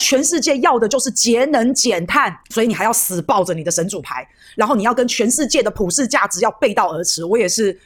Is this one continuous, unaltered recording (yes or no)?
yes